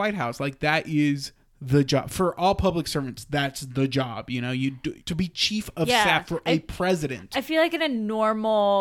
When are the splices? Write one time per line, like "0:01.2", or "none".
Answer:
0:05.0